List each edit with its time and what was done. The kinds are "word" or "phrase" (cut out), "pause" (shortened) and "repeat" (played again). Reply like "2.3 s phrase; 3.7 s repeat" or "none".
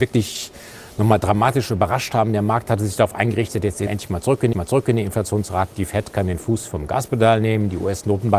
3.9 s word; 4.5 s repeat